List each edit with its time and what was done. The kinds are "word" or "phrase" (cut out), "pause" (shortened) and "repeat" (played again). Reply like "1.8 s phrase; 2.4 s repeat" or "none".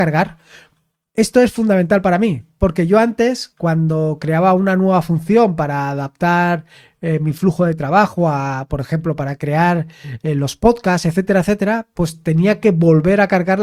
none